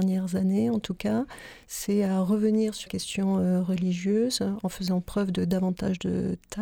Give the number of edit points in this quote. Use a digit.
1